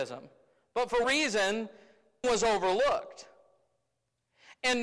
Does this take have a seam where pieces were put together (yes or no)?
yes